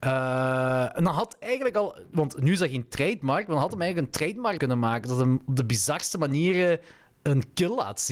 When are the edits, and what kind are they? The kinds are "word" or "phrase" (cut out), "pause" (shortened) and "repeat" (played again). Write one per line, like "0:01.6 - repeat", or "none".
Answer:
0:00.9 - word
0:01.4 - word
0:04.6 - word